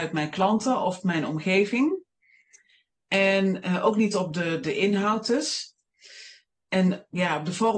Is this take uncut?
yes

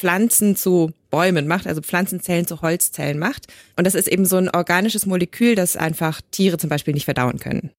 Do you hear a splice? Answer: no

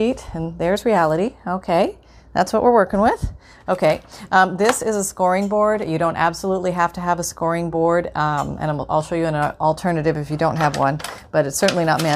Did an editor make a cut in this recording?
no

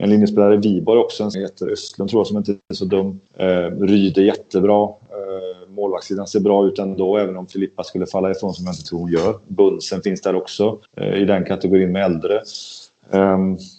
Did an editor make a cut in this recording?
yes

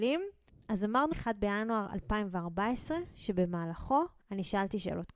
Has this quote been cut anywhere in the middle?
yes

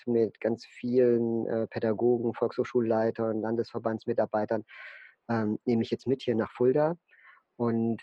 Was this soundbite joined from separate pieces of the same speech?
no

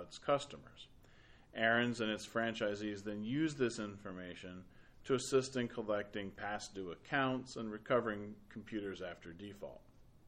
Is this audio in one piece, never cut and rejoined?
yes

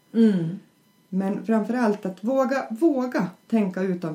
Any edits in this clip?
no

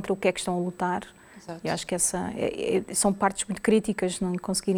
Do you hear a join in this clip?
no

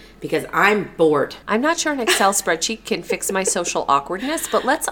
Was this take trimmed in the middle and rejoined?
yes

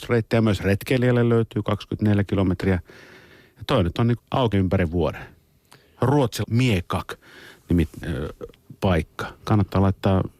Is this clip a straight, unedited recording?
no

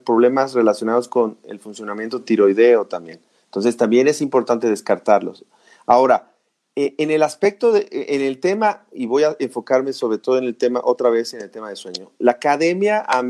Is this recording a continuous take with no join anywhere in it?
yes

